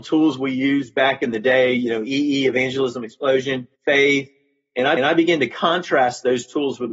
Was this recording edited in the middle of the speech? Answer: yes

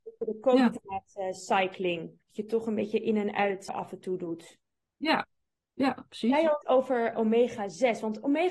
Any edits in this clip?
yes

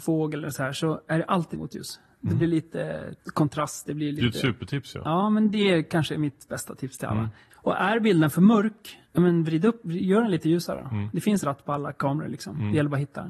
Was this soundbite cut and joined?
yes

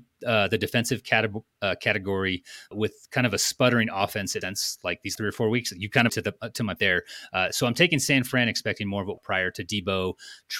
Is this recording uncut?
no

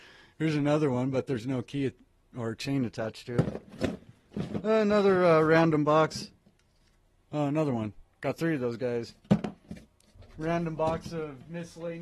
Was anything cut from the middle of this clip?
no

